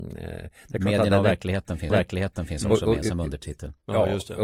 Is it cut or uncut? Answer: cut